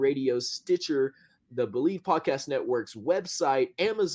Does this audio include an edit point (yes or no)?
no